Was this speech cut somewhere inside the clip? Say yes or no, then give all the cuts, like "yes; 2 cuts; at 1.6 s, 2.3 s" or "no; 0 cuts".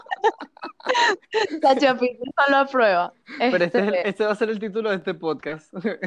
yes; 2 cuts; at 1.2 s, 3.2 s